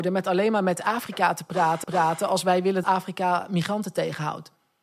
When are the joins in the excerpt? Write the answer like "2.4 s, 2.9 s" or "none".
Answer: 1.8 s, 2.8 s